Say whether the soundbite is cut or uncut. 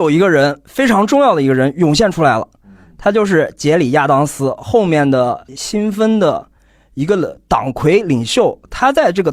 uncut